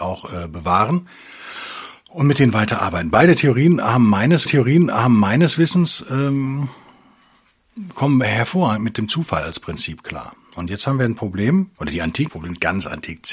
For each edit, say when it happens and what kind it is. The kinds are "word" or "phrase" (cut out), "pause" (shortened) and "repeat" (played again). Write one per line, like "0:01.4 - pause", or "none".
0:04.5 - repeat
0:11.7 - pause
0:12.3 - phrase